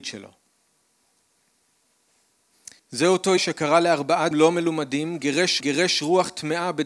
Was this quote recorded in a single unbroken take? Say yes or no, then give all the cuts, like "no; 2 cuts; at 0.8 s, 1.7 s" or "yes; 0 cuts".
no; 4 cuts; at 2.8 s, 3.4 s, 4.3 s, 5.6 s